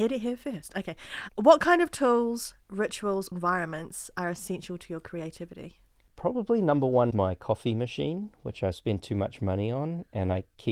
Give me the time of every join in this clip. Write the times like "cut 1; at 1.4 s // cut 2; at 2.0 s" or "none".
cut 1; at 1.3 s // cut 2; at 3.3 s // cut 3; at 7.1 s